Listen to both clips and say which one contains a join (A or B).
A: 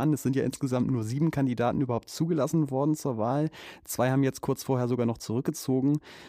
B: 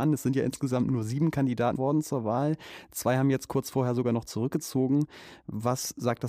B